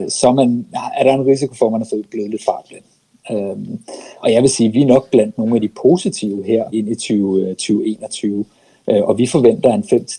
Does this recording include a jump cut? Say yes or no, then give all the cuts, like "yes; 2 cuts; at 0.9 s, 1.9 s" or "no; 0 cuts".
yes; 3 cuts; at 4.2 s, 4.7 s, 6.7 s